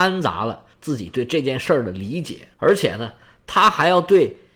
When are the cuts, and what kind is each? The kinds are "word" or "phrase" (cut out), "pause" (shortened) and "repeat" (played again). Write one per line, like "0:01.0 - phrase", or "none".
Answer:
0:02.5 - pause